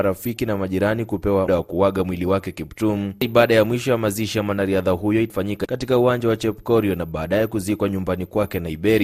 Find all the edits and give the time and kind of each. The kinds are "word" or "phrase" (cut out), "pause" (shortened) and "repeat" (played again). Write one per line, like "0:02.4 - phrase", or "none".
0:01.5 - word